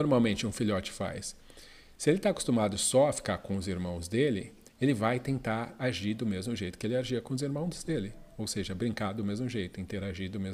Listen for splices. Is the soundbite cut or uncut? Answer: uncut